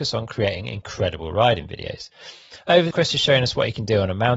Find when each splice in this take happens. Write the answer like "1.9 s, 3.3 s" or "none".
2.9 s